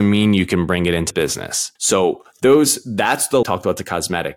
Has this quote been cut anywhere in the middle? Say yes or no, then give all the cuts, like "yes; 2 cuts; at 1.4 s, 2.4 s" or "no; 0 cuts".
yes; 3 cuts; at 1.1 s, 1.8 s, 3.4 s